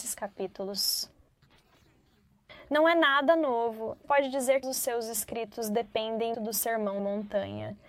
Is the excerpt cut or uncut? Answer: cut